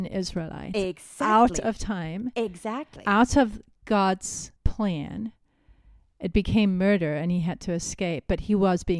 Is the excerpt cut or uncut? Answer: cut